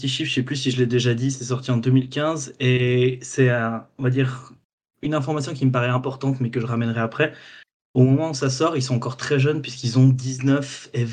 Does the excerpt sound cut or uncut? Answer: uncut